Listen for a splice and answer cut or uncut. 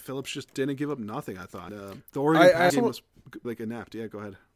cut